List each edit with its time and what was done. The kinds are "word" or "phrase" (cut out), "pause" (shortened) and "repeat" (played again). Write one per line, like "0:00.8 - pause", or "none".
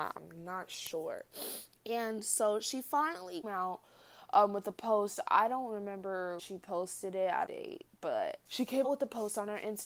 0:01.7 - pause
0:03.4 - word
0:06.4 - word
0:07.5 - phrase
0:08.5 - pause
0:08.8 - word